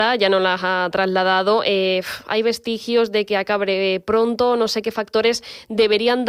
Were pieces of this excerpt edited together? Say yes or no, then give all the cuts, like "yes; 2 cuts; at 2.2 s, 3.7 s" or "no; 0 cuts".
no; 0 cuts